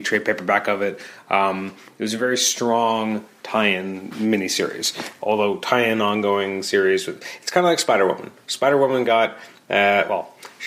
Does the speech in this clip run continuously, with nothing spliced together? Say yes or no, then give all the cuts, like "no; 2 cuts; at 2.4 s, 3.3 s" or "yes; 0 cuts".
yes; 0 cuts